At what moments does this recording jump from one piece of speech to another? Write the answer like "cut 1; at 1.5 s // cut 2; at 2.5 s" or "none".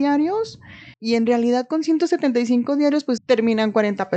cut 1; at 0.9 s // cut 2; at 3.2 s